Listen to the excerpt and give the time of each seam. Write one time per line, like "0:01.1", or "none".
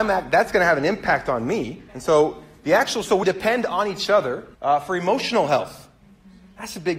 0:01.9
0:03.2
0:04.5